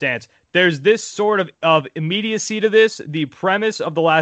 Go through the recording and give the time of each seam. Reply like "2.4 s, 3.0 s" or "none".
1.6 s